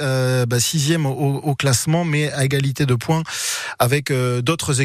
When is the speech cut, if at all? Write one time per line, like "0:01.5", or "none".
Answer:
none